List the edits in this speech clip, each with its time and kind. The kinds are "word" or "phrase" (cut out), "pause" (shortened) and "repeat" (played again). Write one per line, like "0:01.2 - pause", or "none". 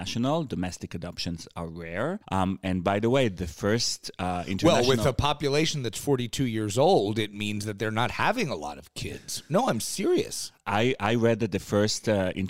0:02.2 - pause